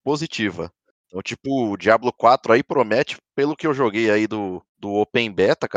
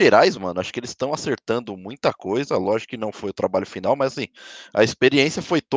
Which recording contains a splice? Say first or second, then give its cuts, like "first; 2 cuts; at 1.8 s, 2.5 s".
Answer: first; 1 cut; at 4.7 s